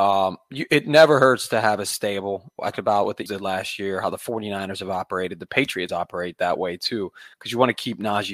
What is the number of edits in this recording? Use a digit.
4